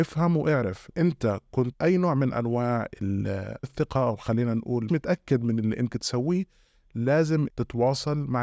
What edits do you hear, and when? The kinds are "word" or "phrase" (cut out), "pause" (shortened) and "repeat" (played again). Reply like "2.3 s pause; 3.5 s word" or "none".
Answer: 0.9 s word; 1.7 s word; 3.6 s word; 4.9 s word; 5.9 s word; 7.5 s word